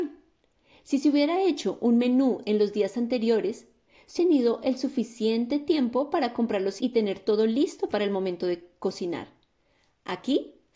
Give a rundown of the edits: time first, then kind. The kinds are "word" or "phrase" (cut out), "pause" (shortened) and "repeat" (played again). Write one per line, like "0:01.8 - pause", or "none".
0:04.2 - word
0:06.8 - word